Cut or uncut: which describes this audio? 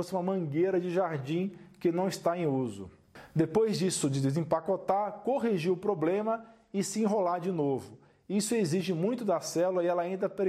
uncut